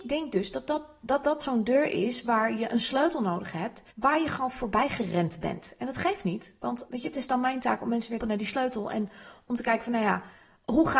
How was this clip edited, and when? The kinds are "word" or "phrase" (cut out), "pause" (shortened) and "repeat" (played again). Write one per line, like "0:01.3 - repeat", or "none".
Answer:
0:03.9 - pause
0:06.9 - word
0:08.2 - word